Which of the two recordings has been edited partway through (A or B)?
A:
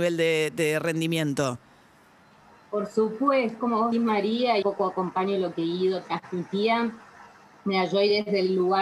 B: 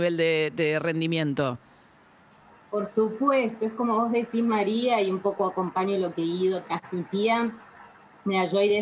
A